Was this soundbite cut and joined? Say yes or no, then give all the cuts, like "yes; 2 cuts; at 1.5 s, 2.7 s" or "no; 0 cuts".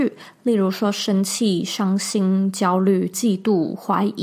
yes; 1 cut; at 3.1 s